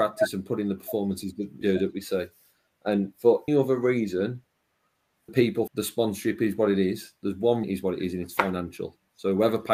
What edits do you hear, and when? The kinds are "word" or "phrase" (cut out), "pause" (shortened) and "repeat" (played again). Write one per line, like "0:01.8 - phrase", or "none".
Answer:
0:01.6 - word
0:03.5 - word
0:05.3 - word
0:05.7 - word
0:07.6 - word